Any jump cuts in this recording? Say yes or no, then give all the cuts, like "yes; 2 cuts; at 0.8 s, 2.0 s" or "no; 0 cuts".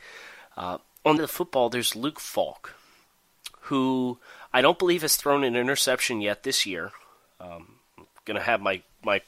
yes; 1 cut; at 1.2 s